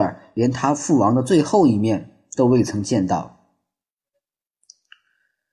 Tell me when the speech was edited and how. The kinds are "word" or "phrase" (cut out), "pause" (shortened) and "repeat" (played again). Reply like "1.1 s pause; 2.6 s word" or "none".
none

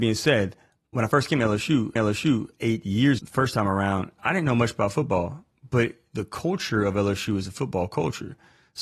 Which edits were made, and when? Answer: 2.0 s repeat; 3.2 s word

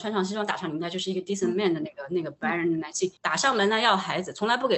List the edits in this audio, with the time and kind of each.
3.2 s pause

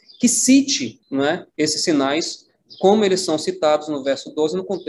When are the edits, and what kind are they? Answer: 1.0 s pause; 1.5 s pause

